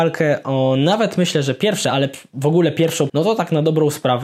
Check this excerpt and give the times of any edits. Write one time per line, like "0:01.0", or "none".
0:01.8
0:03.1